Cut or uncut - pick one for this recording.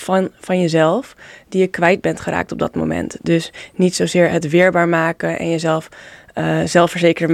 uncut